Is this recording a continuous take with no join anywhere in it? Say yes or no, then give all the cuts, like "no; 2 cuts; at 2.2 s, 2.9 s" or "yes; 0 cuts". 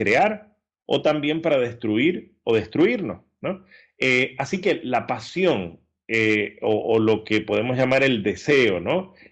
yes; 0 cuts